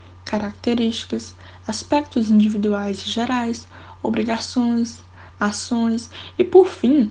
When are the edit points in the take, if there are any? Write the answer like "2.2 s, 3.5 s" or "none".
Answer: none